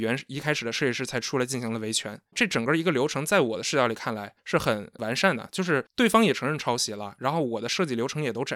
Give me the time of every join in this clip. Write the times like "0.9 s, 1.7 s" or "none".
4.4 s, 5.9 s